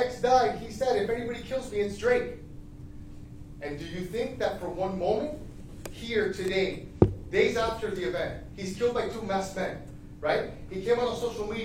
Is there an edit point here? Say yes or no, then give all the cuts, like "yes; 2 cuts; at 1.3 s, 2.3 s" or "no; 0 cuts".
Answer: no; 0 cuts